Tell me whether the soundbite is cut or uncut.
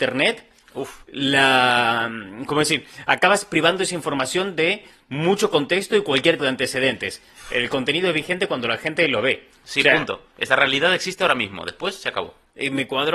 cut